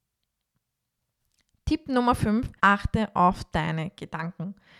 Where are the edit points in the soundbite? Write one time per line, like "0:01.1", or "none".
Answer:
0:02.6